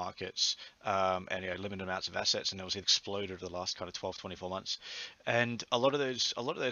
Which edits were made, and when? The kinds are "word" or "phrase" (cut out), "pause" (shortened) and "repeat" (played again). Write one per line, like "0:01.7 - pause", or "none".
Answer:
0:02.8 - word
0:03.4 - word